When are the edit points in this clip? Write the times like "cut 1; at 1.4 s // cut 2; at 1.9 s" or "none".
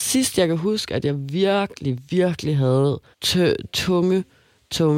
cut 1; at 2.0 s // cut 2; at 3.1 s